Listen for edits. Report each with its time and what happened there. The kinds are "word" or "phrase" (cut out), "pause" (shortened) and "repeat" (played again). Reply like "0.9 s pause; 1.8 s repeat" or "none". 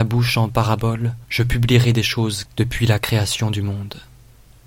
1.2 s pause; 2.5 s word